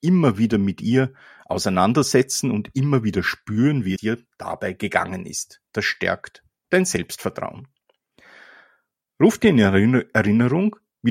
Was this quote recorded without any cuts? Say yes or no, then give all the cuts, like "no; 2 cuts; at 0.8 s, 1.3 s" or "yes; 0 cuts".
no; 1 cut; at 4.0 s